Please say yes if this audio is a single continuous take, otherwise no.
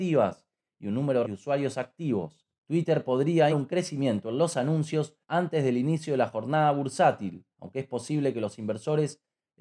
no